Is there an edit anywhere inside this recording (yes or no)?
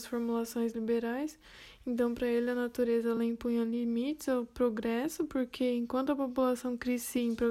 no